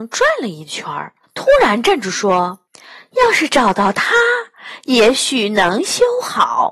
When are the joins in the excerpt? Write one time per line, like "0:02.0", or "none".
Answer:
0:01.2
0:02.7

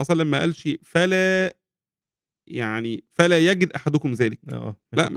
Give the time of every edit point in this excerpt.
none

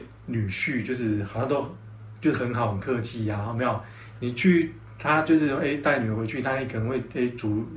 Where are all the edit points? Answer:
none

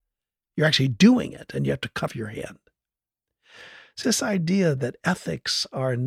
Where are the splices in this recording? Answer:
0:02.1
0:04.0

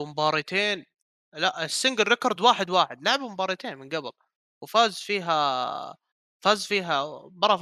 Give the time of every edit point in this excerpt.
none

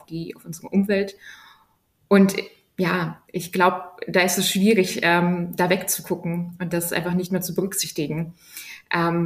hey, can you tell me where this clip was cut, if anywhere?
none

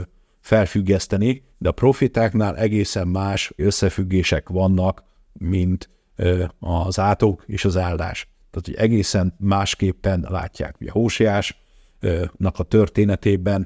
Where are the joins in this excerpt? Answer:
0:01.5
0:03.6

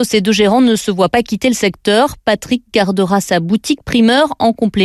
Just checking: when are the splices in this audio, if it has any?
none

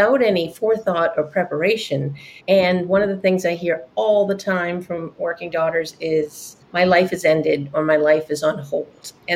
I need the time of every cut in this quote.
0:02.4
0:06.6

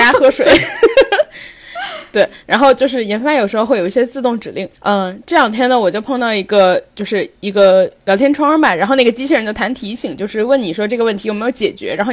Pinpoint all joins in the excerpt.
0:04.8

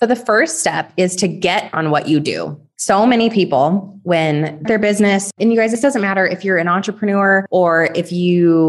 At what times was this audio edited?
0:01.7
0:04.6

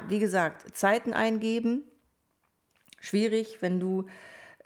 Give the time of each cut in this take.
none

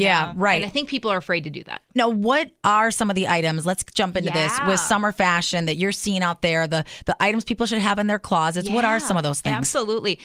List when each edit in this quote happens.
0:01.9

